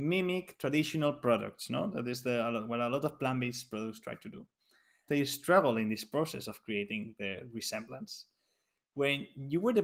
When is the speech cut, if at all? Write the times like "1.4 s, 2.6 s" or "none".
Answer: 5.1 s